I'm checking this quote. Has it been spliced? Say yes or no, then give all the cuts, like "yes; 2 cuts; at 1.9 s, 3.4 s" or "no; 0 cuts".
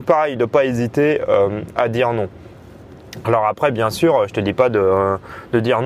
no; 0 cuts